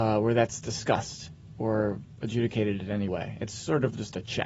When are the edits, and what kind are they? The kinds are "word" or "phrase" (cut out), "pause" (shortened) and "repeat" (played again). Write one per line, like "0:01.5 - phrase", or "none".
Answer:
0:03.1 - word